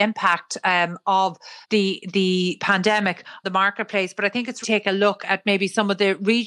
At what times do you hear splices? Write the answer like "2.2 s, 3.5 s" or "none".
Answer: 1.6 s, 3.4 s, 4.6 s